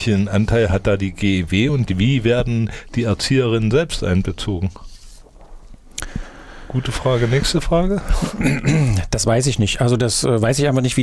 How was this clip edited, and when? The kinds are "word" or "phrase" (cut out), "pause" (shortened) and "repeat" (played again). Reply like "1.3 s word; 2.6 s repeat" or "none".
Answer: none